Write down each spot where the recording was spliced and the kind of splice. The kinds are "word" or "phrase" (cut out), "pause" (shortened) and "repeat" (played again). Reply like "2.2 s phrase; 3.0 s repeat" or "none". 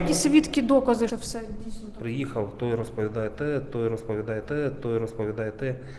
1.1 s phrase; 4.4 s repeat

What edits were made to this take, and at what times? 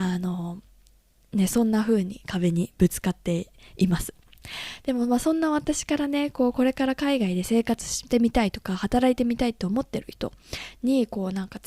none

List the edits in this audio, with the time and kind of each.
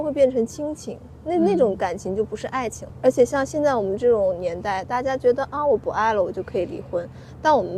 2.9 s word

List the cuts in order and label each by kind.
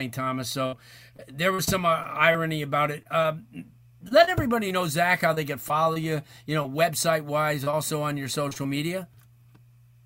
none

